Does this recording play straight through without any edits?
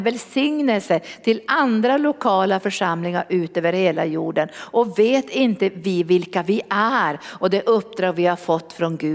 yes; 0 cuts

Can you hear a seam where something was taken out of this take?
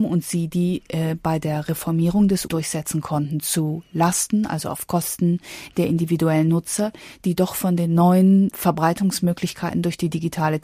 yes; 2 cuts; at 2.5 s, 8.5 s

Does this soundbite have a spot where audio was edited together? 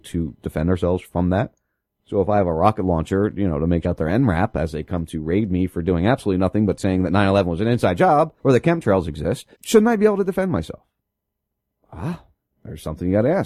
yes; 3 cuts; at 3.8 s, 8.4 s, 9.5 s

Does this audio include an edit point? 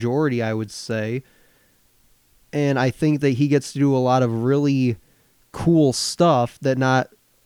no; 0 cuts

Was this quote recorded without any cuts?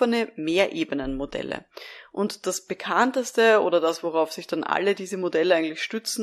yes; 0 cuts

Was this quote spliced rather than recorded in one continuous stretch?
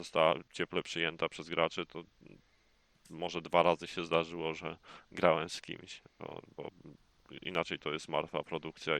no; 0 cuts

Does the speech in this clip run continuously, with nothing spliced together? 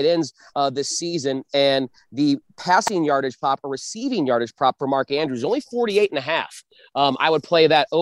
yes; 0 cuts

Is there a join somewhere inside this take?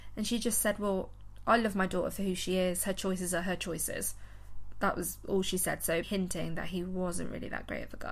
yes; 1 cut; at 6.0 s

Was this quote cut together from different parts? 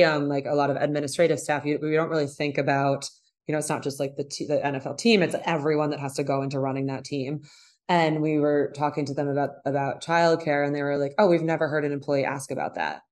no; 0 cuts

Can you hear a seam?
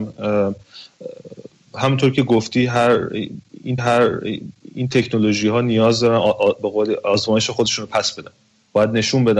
yes; 1 cut; at 3.8 s

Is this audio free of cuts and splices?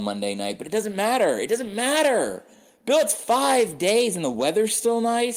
yes; 0 cuts

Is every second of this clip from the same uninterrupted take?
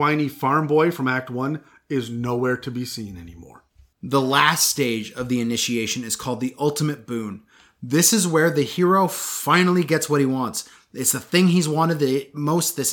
yes; 0 cuts

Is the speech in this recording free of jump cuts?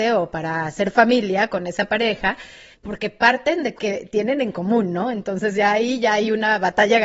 no; 2 cuts; at 2.7 s, 3.8 s

